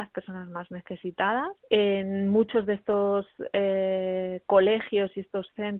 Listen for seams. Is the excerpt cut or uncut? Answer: cut